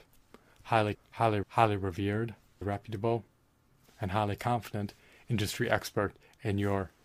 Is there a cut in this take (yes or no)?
yes